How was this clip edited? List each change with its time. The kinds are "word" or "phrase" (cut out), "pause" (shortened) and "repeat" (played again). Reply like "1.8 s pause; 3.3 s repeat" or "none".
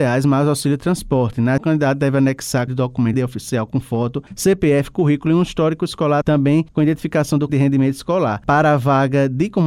1.6 s word; 2.7 s word; 3.1 s word; 6.2 s word; 7.5 s word